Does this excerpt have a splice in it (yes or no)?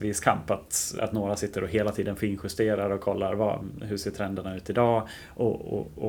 yes